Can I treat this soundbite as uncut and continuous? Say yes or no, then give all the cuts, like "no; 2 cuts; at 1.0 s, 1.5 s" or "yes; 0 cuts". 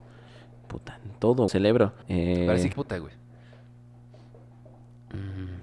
no; 3 cuts; at 1.5 s, 2.0 s, 2.7 s